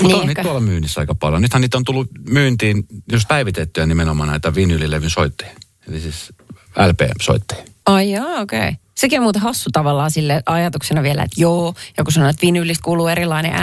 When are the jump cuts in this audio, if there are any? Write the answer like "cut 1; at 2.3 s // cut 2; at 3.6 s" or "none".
cut 1; at 3.3 s